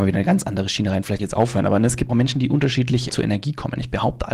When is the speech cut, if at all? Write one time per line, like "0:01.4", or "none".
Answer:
0:01.2
0:02.1
0:03.1